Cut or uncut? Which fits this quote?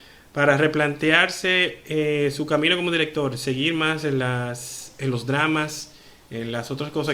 uncut